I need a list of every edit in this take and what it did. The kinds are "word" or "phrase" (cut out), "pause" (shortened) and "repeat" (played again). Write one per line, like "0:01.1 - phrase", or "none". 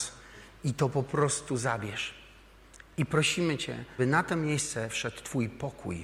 0:04.0 - word